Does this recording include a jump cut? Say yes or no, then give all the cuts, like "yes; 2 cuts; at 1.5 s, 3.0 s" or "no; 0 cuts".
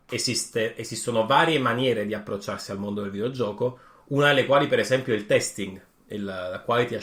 no; 0 cuts